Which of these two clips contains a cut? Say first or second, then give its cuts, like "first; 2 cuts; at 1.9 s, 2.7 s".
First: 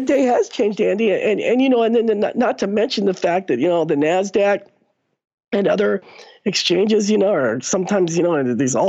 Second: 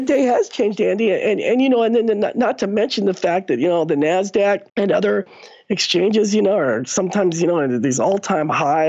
second; 1 cut; at 4.7 s